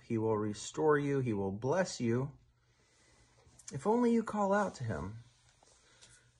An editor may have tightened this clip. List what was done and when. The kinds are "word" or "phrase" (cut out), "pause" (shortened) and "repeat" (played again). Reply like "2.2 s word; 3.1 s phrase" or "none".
none